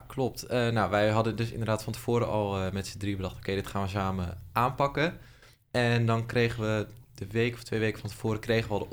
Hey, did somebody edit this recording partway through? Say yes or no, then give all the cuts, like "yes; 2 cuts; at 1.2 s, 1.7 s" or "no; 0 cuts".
no; 0 cuts